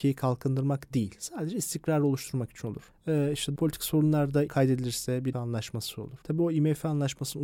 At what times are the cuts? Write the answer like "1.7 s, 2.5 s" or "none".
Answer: 3.6 s, 4.5 s, 5.3 s, 6.2 s